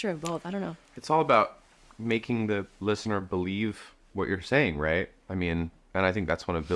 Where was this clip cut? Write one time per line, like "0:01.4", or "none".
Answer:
none